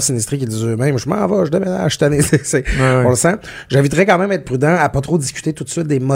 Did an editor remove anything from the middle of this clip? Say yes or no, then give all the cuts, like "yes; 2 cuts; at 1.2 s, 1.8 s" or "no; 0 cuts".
no; 0 cuts